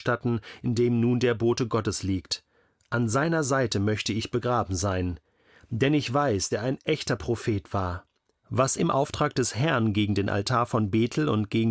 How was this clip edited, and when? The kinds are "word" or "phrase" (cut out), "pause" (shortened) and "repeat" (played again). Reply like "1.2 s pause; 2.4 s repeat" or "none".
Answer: 6.5 s word; 8.8 s word